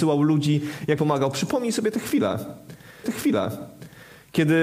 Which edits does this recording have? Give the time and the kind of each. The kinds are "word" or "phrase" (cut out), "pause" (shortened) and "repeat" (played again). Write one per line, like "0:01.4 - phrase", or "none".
0:01.0 - word
0:03.0 - repeat